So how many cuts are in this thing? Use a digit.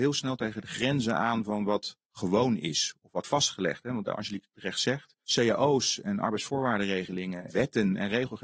5